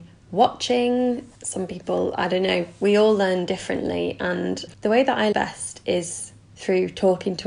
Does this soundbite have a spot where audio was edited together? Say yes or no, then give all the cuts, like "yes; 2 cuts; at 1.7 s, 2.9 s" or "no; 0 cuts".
yes; 2 cuts; at 1.3 s, 5.3 s